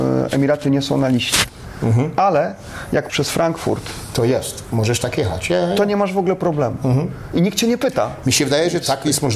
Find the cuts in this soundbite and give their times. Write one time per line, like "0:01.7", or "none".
0:03.1